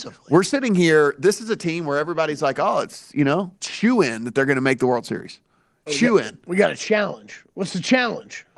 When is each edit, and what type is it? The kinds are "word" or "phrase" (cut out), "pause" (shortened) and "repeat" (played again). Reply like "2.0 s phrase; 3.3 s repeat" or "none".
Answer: 3.6 s pause